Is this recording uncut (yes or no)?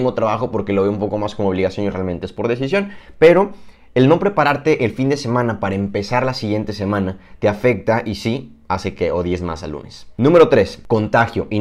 yes